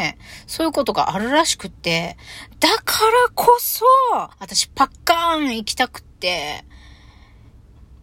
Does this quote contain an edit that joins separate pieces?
yes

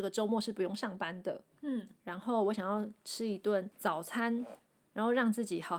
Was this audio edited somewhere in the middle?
yes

